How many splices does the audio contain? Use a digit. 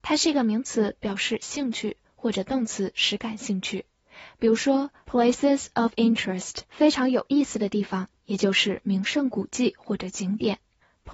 1